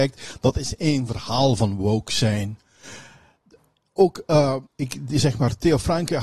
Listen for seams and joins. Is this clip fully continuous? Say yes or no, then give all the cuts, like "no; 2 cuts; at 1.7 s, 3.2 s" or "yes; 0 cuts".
no; 1 cut; at 4.7 s